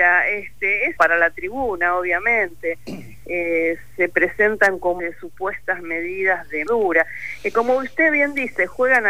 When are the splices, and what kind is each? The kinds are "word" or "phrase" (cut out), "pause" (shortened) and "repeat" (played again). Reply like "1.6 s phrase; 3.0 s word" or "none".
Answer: 1.0 s phrase; 5.0 s word; 6.7 s word